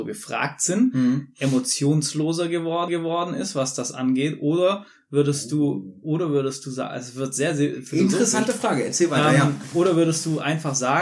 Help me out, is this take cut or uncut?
cut